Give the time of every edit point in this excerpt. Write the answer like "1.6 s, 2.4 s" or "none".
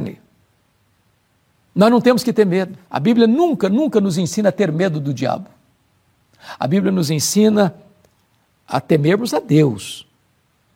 2.8 s